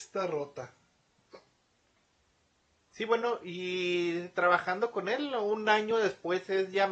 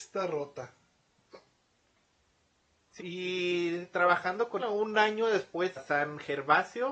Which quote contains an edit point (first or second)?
second